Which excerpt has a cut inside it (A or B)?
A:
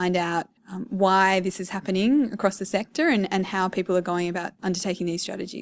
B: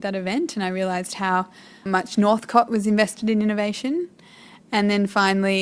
B